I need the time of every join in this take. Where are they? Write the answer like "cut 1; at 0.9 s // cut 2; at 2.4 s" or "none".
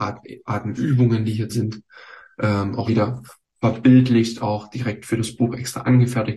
cut 1; at 1.5 s // cut 2; at 2.9 s